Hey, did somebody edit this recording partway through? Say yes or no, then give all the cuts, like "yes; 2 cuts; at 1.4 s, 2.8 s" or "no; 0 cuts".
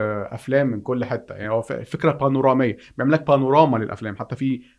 no; 0 cuts